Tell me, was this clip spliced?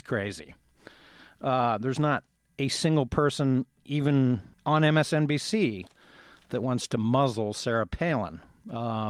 yes; 1 cut; at 4.5 s

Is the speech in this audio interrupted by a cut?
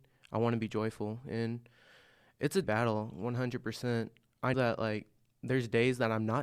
yes; 2 cuts; at 2.6 s, 4.5 s

